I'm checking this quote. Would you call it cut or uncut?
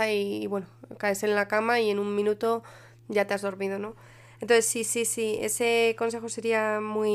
uncut